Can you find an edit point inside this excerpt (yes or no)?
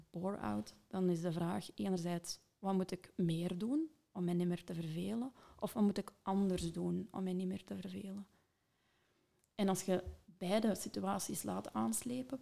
no